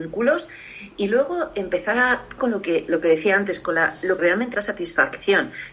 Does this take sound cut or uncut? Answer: cut